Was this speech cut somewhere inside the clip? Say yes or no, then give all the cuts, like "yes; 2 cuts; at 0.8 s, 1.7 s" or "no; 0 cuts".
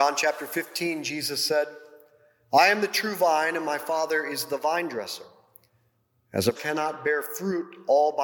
yes; 1 cut; at 6.5 s